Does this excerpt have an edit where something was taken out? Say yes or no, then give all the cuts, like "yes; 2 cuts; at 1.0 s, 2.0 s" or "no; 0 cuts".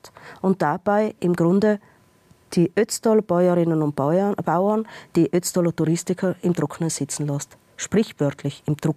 no; 0 cuts